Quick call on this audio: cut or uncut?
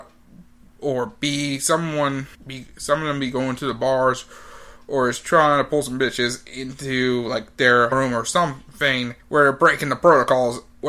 cut